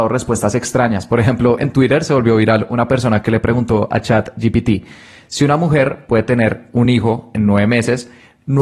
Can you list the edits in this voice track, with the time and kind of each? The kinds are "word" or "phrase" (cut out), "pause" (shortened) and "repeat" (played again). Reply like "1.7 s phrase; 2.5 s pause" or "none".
none